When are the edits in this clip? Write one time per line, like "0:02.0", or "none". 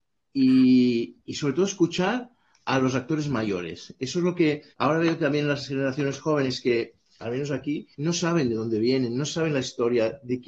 0:01.2
0:04.7
0:07.0
0:07.9